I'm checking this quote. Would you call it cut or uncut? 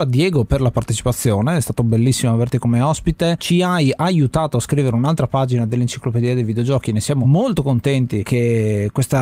uncut